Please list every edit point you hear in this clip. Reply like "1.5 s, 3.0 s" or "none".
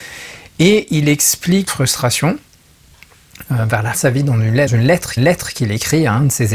1.7 s, 3.9 s, 4.7 s, 5.2 s